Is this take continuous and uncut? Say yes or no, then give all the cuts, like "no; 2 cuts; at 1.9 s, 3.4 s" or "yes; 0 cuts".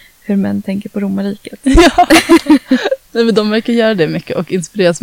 no; 1 cut; at 3.0 s